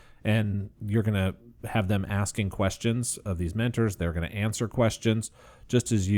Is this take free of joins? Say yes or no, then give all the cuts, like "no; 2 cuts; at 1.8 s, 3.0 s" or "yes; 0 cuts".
yes; 0 cuts